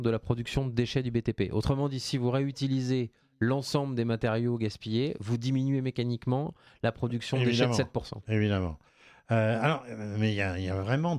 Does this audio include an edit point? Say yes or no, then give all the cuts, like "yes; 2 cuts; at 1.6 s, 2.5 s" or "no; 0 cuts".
no; 0 cuts